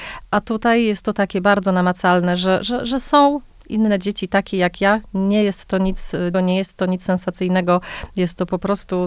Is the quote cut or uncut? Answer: cut